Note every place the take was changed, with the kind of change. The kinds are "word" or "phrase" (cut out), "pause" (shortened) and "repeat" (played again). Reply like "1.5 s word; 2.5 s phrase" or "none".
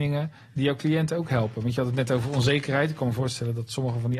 none